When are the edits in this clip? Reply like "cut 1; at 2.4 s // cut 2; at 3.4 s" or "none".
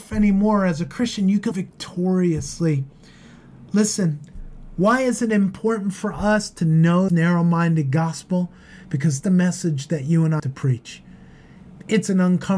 cut 1; at 1.5 s // cut 2; at 7.1 s // cut 3; at 9.2 s // cut 4; at 10.4 s